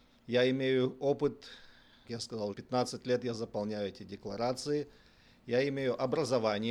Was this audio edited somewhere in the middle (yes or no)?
yes